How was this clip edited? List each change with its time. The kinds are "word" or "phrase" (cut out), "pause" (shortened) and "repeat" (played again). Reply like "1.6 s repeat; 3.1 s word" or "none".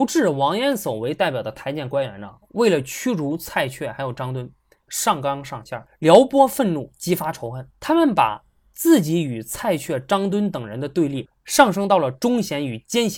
4.9 s phrase; 5.9 s pause; 7.7 s pause